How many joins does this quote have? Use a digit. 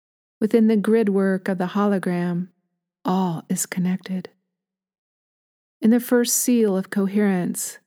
0